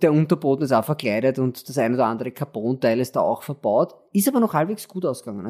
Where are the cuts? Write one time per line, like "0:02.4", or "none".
none